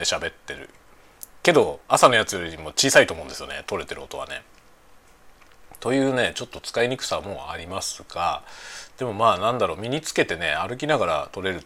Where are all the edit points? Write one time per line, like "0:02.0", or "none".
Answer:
0:01.8